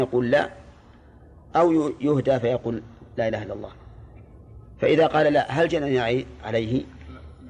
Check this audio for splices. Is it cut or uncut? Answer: uncut